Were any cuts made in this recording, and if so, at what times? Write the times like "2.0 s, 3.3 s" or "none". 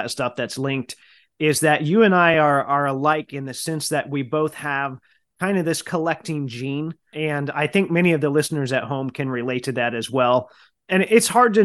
none